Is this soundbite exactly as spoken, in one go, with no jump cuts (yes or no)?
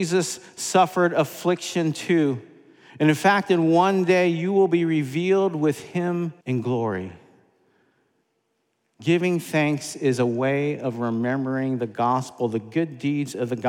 no